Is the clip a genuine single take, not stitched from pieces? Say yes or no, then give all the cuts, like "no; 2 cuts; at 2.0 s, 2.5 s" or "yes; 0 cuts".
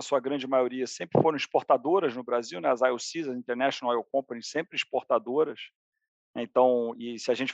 yes; 0 cuts